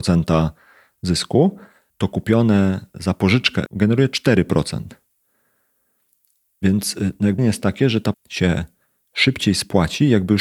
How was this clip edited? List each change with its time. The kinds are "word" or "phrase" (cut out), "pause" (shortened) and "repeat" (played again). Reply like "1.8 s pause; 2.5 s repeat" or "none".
1.9 s word; 3.7 s word; 7.4 s word; 8.1 s word